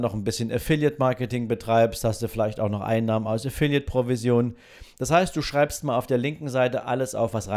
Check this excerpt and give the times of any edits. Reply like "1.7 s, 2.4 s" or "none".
none